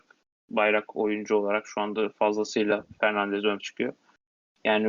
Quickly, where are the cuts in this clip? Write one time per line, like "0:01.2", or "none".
0:03.6